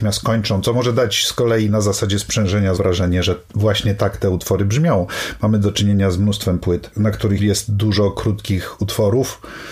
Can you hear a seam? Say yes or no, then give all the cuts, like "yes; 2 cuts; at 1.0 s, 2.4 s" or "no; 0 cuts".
yes; 3 cuts; at 2.8 s, 3.5 s, 7.4 s